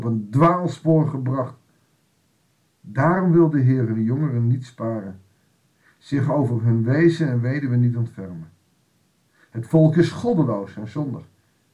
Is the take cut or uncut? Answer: uncut